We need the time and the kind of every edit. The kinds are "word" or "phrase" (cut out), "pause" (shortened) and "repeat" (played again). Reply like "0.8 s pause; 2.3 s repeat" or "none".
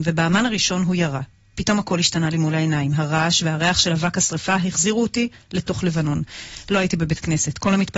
none